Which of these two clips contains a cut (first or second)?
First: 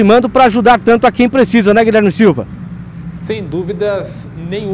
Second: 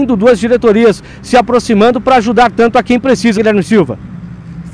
second